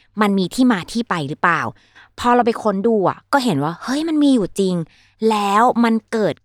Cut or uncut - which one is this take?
uncut